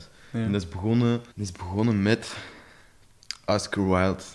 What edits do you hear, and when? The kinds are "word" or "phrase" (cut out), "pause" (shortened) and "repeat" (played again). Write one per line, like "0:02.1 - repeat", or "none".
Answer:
0:01.3 - pause

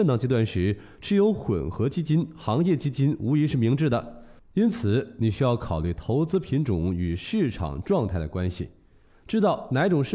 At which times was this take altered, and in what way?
none

